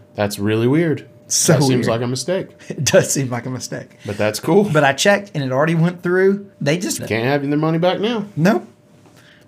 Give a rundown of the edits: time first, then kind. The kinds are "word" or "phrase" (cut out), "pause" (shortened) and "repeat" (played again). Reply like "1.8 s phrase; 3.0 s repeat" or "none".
6.5 s pause; 7.0 s word